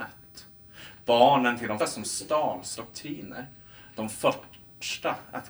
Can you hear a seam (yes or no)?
yes